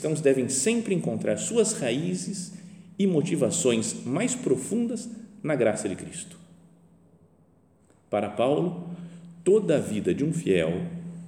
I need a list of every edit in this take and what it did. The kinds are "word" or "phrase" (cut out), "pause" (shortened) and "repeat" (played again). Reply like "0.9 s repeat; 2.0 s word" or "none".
none